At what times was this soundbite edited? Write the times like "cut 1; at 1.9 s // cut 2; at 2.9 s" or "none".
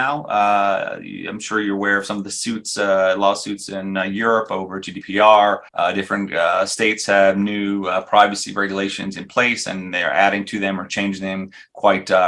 cut 1; at 5.7 s